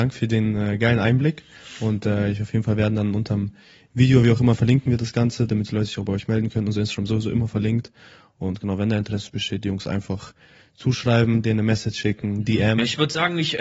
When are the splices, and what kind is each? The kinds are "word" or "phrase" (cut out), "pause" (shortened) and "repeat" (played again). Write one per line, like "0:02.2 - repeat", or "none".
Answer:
none